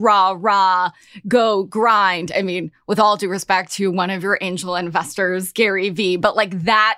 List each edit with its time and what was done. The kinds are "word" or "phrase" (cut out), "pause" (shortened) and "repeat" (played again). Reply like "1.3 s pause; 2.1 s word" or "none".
none